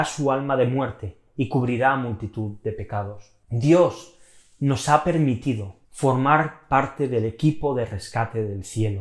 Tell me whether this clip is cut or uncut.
cut